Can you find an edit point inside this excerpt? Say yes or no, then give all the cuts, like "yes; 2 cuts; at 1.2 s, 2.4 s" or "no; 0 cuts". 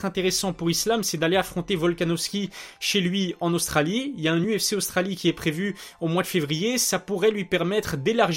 no; 0 cuts